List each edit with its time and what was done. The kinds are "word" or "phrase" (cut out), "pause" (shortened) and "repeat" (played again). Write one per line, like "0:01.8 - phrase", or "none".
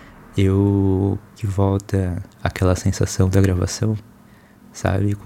0:01.4 - word
0:02.3 - pause